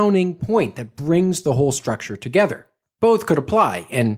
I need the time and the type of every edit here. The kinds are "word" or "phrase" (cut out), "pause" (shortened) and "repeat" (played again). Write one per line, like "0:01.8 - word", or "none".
none